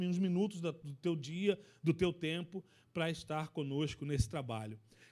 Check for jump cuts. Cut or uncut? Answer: uncut